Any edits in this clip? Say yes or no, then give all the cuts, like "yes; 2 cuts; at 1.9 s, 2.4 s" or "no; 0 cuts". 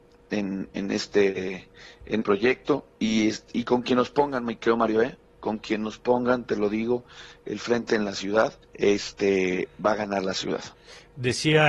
yes; 2 cuts; at 2.2 s, 8.6 s